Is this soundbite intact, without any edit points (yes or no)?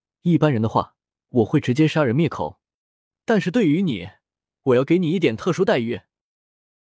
no